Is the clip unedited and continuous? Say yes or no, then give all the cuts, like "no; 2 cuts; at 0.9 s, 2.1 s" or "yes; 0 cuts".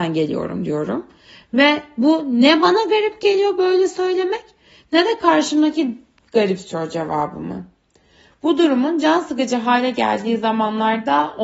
yes; 0 cuts